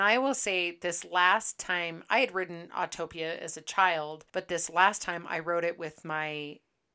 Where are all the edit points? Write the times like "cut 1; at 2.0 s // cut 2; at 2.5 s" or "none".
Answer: cut 1; at 4.3 s